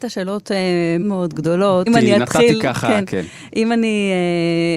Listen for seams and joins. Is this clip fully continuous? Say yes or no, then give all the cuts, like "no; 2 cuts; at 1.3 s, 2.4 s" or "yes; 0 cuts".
no; 2 cuts; at 1.0 s, 1.9 s